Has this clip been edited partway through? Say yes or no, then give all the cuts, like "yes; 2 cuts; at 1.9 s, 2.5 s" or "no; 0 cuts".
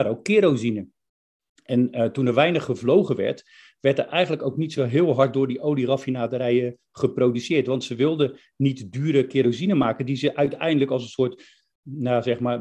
no; 0 cuts